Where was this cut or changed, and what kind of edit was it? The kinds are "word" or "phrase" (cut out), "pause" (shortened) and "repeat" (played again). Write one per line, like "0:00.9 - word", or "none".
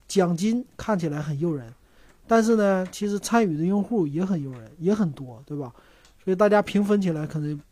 none